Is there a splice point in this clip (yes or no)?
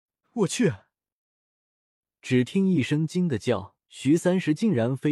yes